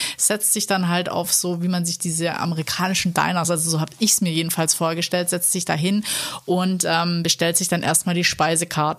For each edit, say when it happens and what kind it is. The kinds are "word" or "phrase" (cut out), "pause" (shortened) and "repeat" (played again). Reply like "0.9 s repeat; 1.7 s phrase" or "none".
none